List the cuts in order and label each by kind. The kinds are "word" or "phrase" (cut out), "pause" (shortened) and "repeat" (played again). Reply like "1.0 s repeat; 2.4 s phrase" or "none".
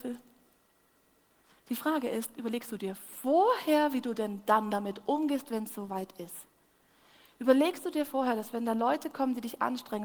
none